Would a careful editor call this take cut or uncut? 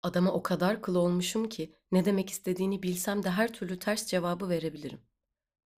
uncut